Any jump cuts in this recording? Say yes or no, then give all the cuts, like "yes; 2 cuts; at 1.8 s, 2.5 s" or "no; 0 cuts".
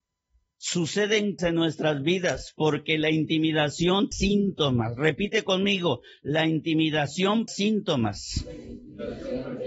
yes; 3 cuts; at 1.4 s, 4.1 s, 7.5 s